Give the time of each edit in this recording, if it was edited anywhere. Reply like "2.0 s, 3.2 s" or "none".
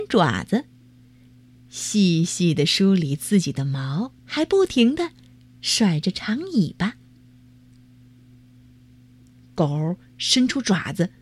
4.2 s